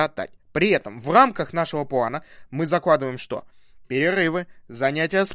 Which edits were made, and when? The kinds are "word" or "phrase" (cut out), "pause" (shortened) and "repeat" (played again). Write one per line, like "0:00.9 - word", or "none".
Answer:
none